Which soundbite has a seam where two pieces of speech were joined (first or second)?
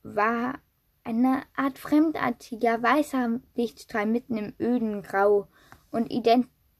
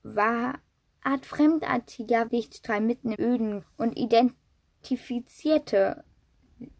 second